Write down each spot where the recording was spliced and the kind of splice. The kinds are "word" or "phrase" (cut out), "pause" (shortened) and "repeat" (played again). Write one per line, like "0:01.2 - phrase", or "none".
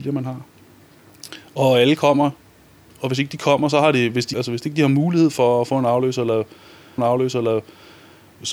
0:04.3 - word
0:07.0 - repeat

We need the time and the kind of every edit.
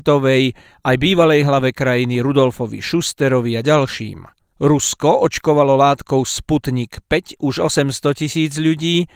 none

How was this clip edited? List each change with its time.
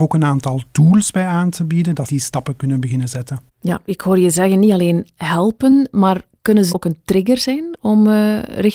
0:02.1 - word
0:06.7 - word

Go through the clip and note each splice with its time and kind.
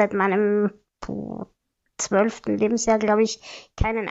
none

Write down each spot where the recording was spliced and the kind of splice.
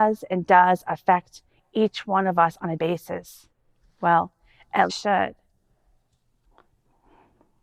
0:02.8 - word
0:04.9 - phrase

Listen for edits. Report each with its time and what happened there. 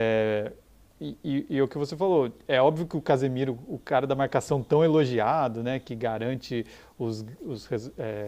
none

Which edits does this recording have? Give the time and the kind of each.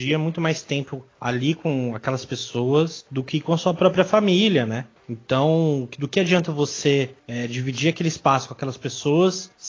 none

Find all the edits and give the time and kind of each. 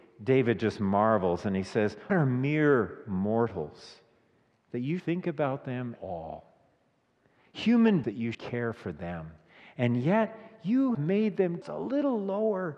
0:02.1 - word
0:05.0 - word
0:06.0 - word
0:08.0 - word
0:08.3 - word
0:10.9 - word
0:11.6 - word

